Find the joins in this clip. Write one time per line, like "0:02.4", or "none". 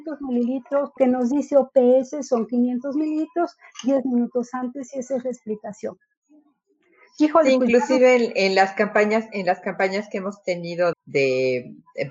0:01.0
0:10.9

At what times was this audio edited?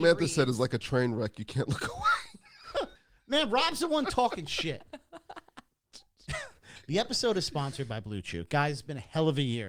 0:03.0

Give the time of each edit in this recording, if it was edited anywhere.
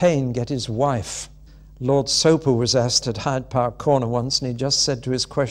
0:01.5
0:03.0

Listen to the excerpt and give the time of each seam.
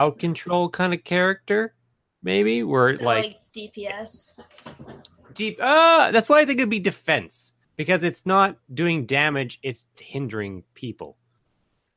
0:03.5
0:07.6
0:09.9

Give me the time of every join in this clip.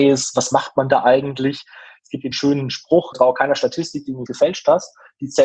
0:02.3
0:03.1
0:04.3

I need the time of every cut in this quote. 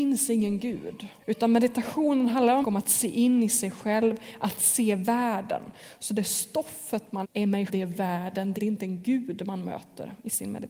0:01.2
0:02.6
0:07.2
0:07.7
0:08.6

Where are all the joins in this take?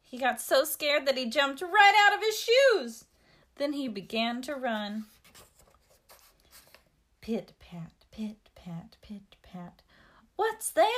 none

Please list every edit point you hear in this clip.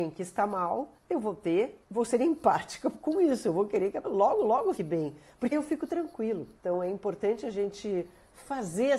0:01.0
0:01.8
0:04.0
0:04.8
0:05.5
0:06.6

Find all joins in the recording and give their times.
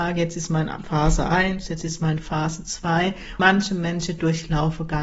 0:03.4

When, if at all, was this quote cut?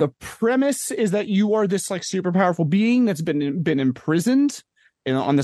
none

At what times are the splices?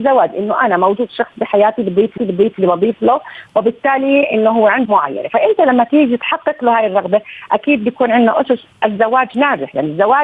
0:02.2
0:04.9

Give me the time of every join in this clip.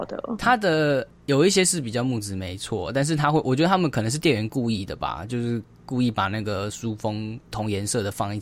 0:07.4

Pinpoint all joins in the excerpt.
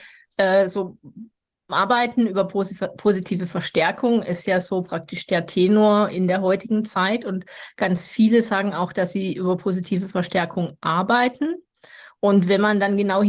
none

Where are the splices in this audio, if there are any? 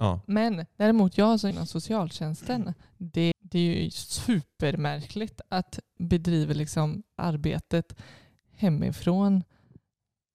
0:01.5
0:03.3
0:06.0
0:07.2

